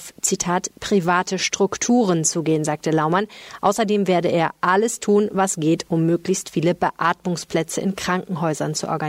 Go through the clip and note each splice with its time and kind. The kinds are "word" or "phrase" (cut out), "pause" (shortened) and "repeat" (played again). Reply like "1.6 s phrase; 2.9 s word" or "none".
none